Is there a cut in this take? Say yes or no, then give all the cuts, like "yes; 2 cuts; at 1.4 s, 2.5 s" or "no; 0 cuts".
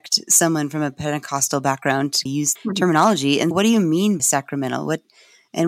yes; 4 cuts; at 2.3 s, 2.6 s, 3.5 s, 4.2 s